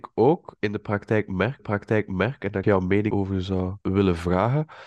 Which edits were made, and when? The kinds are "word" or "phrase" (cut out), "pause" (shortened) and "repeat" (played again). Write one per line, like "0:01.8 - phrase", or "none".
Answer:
0:01.6 - repeat
0:02.6 - phrase
0:03.1 - word
0:03.8 - pause